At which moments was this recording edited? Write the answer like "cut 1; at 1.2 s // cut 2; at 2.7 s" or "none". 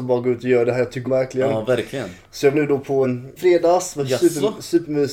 cut 1; at 1.0 s // cut 2; at 2.5 s // cut 3; at 3.0 s // cut 4; at 3.4 s